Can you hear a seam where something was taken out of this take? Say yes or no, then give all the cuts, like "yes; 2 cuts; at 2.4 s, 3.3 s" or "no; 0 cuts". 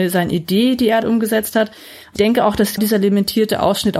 yes; 3 cuts; at 1.0 s, 2.2 s, 2.8 s